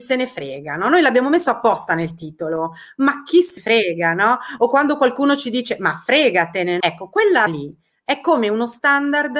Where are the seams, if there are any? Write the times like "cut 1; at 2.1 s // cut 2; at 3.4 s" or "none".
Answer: cut 1; at 3.6 s // cut 2; at 6.8 s // cut 3; at 7.5 s

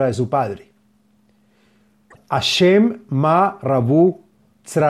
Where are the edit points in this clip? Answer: none

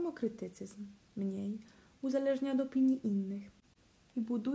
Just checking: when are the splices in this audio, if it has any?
none

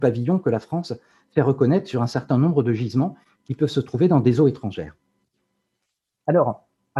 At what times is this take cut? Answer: none

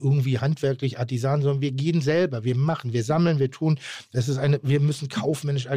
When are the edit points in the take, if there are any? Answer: none

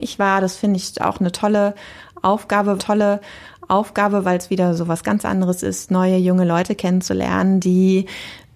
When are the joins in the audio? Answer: cut 1; at 2.8 s

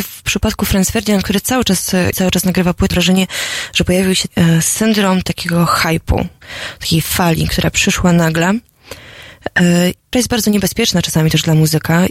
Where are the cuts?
cut 1; at 2.1 s // cut 2; at 2.9 s // cut 3; at 4.3 s // cut 4; at 10.1 s

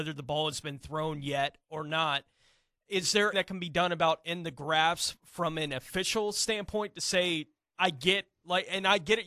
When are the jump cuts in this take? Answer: cut 1; at 3.3 s

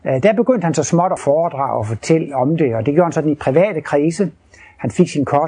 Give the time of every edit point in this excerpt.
cut 1; at 1.2 s

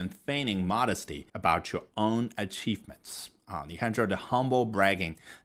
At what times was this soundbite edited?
cut 1; at 1.3 s

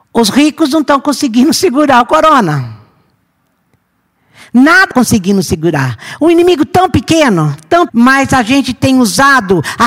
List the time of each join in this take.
cut 1; at 4.9 s // cut 2; at 7.9 s

